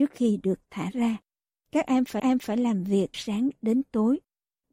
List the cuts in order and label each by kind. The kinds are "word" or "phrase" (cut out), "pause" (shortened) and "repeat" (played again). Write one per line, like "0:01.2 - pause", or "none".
0:02.2 - repeat
0:03.1 - word